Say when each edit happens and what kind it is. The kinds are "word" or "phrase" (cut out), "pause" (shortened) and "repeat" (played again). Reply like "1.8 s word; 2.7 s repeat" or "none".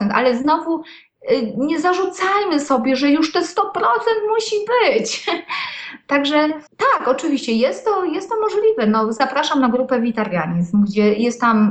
6.7 s pause